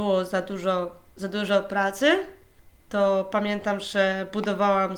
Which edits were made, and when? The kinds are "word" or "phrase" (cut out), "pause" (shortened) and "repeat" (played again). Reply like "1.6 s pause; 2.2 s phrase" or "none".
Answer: 2.6 s pause